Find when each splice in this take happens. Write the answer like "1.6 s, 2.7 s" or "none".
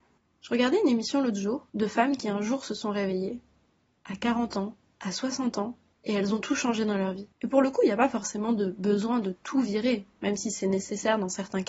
1.7 s, 5.9 s, 7.3 s